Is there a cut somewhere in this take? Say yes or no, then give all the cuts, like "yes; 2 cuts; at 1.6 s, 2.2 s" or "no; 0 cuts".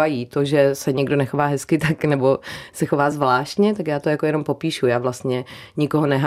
no; 0 cuts